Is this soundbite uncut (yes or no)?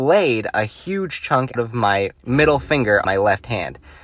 no